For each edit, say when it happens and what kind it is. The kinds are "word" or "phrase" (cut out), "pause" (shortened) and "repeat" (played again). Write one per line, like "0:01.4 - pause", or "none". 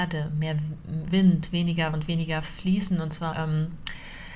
0:01.1 - word
0:01.9 - word
0:03.3 - word